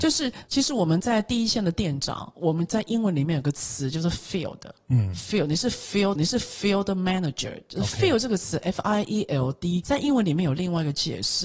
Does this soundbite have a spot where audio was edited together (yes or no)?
yes